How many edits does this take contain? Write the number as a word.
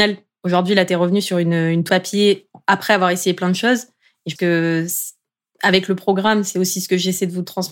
two